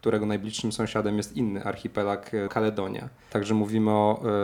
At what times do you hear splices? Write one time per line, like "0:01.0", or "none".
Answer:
0:02.5